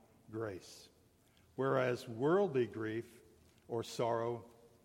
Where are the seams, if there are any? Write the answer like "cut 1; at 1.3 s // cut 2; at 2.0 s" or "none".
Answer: none